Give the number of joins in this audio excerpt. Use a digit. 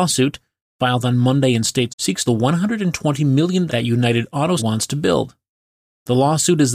4